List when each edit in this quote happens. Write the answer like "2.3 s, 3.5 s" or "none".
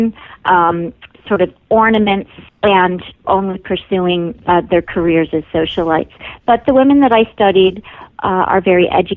2.5 s, 3.2 s